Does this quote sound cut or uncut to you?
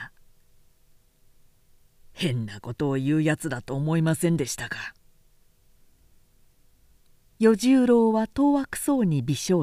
uncut